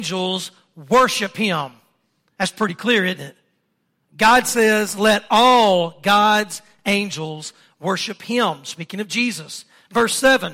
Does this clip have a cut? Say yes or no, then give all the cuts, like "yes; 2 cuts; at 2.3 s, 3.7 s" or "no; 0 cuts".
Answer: no; 0 cuts